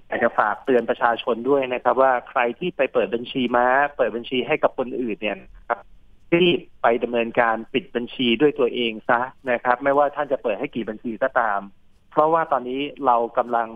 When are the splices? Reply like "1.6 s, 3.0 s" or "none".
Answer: none